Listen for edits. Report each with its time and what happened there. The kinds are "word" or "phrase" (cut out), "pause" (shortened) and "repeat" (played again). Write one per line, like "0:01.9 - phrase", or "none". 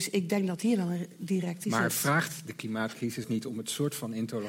0:01.6 - word
0:03.2 - word